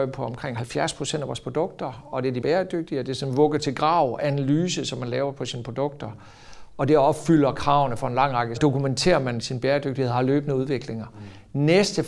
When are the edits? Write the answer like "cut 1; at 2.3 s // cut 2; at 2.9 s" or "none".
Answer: cut 1; at 2.4 s // cut 2; at 8.6 s